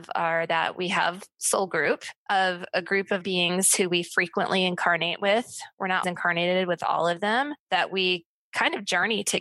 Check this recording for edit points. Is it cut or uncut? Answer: cut